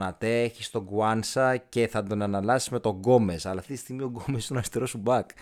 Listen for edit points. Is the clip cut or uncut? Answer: uncut